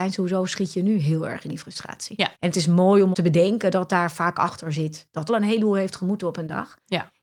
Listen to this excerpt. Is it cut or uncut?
cut